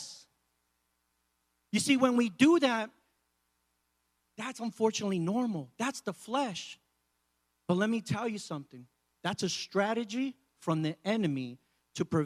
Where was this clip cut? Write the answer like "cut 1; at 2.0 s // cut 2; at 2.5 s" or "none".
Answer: none